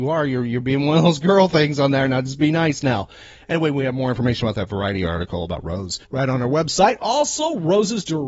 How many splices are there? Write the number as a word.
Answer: one